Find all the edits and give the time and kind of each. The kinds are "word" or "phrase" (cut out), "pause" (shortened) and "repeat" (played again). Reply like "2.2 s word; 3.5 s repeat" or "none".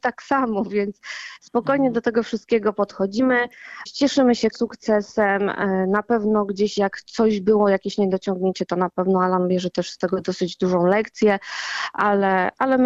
4.5 s word